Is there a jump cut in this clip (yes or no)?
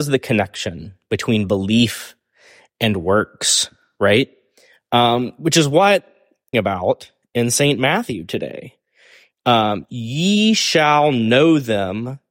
yes